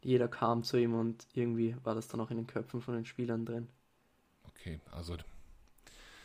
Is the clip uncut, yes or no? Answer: yes